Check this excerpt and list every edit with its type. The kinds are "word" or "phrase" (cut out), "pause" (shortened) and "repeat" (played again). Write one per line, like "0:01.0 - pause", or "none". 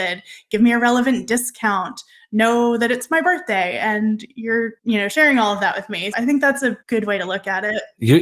0:04.8 - pause
0:06.1 - word
0:06.8 - pause